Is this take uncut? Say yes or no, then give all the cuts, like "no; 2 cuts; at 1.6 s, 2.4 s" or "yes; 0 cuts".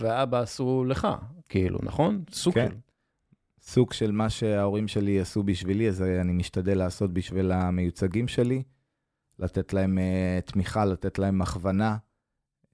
yes; 0 cuts